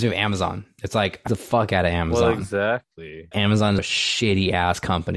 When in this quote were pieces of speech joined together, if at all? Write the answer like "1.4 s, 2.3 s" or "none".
1.3 s, 3.3 s, 3.8 s